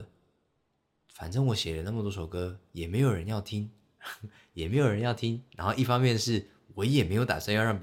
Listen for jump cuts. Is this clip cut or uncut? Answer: uncut